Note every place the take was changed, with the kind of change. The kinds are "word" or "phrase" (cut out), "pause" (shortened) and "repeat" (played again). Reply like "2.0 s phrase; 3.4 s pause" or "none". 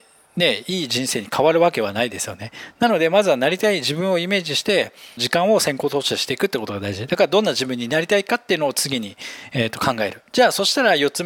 5.2 s phrase; 10.3 s pause